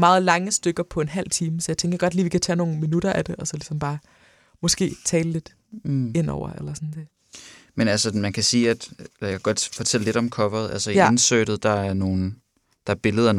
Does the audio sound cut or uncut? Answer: uncut